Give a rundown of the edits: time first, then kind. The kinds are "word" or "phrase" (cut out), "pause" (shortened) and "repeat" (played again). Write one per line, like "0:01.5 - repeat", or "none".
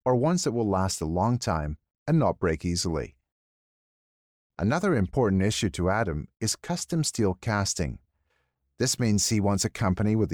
none